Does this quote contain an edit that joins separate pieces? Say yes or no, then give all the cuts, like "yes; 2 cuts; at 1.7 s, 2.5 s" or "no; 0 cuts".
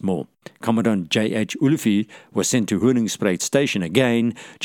no; 0 cuts